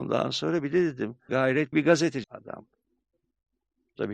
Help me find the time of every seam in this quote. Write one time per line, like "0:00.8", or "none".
0:01.3
0:01.7
0:02.2

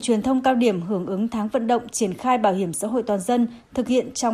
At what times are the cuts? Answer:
none

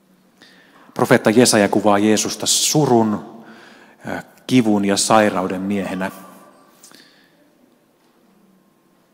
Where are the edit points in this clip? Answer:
none

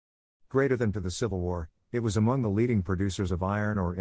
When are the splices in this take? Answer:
0:00.9

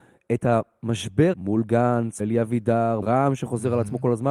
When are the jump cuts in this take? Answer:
0:01.3
0:02.2
0:03.0

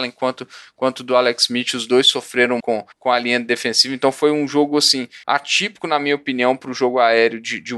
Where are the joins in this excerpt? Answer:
0:02.6
0:02.9
0:05.2

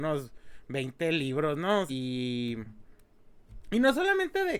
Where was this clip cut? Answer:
0:01.9

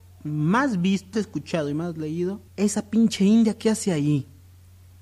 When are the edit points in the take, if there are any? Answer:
0:01.1
0:02.5

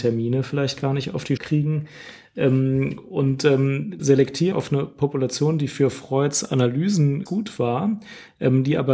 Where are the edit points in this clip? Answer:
0:01.4
0:04.0
0:04.5
0:07.3

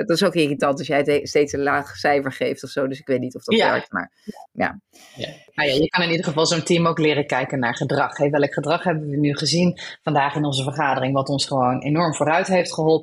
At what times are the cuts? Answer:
none

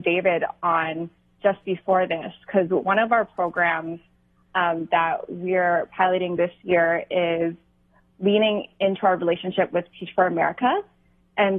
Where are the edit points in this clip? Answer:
none

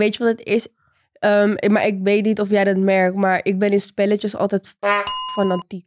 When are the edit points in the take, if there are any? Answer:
none

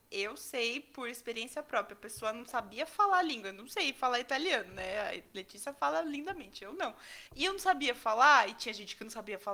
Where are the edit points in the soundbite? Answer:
0:07.3

